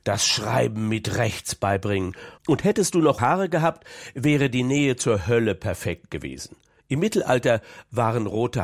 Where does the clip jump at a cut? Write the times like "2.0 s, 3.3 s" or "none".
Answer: 2.4 s, 3.2 s